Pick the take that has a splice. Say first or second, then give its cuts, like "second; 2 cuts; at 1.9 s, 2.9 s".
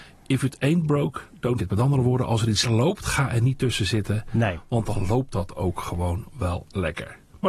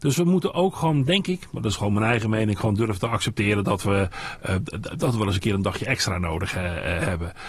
first; 2 cuts; at 1.6 s, 2.6 s